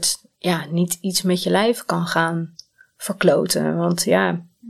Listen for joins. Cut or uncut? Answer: uncut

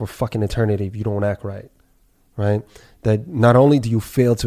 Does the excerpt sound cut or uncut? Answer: uncut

